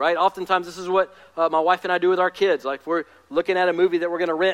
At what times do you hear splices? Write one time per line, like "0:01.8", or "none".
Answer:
none